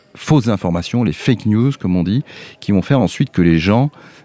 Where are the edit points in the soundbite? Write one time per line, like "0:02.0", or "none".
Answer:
none